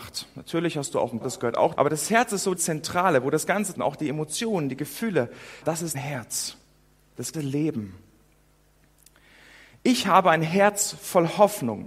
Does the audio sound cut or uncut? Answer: cut